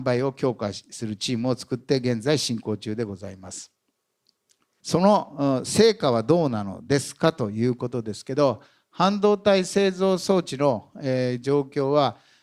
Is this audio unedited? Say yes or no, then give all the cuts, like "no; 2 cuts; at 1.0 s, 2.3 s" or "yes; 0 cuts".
yes; 0 cuts